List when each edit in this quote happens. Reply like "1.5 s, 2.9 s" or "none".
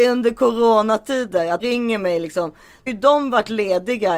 1.6 s, 2.9 s